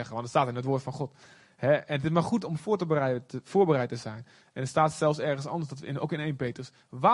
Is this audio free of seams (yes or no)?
yes